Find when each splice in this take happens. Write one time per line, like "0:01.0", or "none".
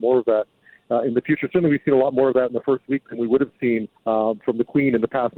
0:04.0